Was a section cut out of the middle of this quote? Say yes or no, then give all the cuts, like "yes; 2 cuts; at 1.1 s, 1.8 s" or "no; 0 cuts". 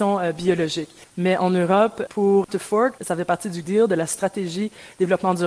yes; 3 cuts; at 2.5 s, 3.0 s, 3.6 s